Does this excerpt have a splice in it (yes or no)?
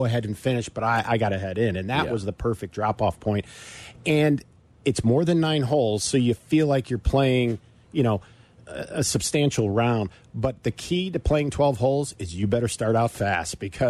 no